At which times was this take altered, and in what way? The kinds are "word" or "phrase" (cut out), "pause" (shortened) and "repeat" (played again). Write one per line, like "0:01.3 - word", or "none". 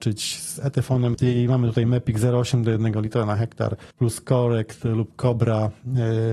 0:01.1 - word
0:03.9 - pause